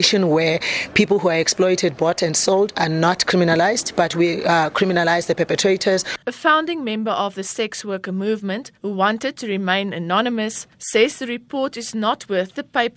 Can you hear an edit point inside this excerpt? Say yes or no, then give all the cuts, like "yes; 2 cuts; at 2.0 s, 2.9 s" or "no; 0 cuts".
yes; 3 cuts; at 6.2 s, 8.8 s, 10.7 s